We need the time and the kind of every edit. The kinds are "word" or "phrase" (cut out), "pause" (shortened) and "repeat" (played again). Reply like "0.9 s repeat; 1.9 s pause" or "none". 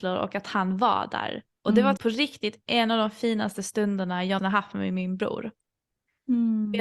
1.5 s pause; 2.0 s word; 4.4 s word